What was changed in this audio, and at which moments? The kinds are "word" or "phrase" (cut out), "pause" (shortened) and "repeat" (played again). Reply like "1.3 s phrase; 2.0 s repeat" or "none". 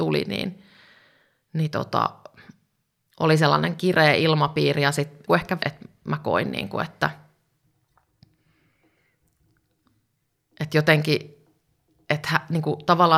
5.3 s phrase; 5.6 s phrase